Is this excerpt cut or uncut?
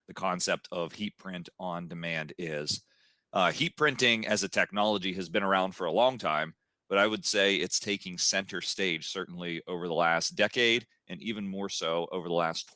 uncut